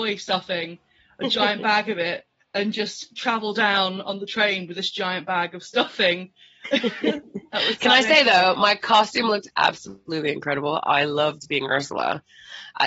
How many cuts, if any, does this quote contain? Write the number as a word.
zero